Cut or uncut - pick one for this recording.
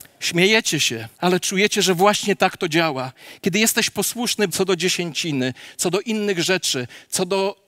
cut